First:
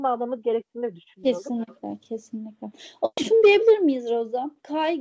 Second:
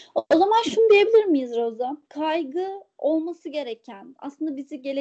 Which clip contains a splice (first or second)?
first